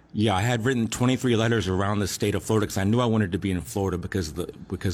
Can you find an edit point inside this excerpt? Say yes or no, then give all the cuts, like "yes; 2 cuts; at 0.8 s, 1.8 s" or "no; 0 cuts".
no; 0 cuts